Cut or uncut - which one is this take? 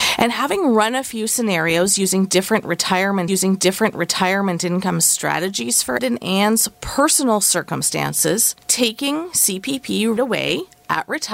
cut